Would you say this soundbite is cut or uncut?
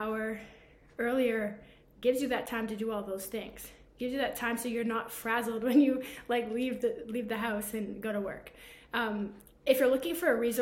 uncut